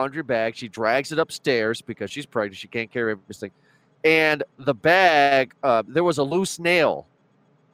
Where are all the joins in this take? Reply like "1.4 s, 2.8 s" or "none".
4.5 s